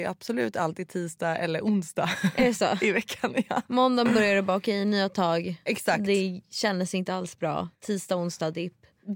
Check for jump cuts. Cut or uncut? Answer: cut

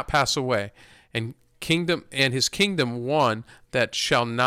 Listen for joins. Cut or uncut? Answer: uncut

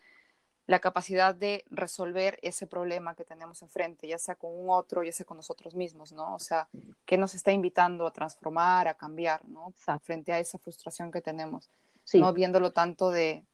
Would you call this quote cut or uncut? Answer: uncut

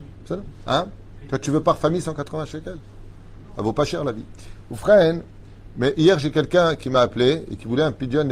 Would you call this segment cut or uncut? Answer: uncut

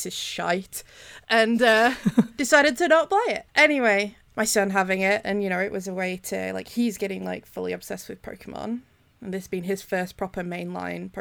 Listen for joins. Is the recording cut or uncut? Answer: uncut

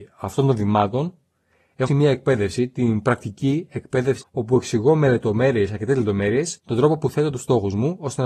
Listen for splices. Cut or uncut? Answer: cut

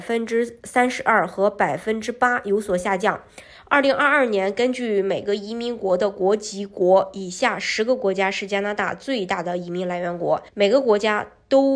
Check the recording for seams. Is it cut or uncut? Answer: cut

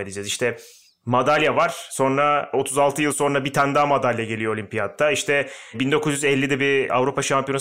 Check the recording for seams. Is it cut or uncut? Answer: cut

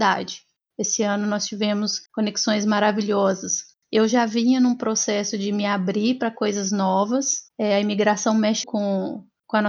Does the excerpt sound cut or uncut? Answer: cut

